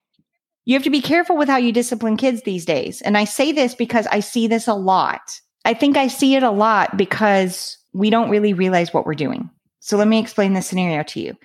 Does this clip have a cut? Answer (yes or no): no